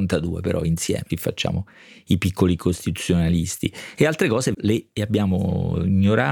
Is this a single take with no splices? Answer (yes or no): no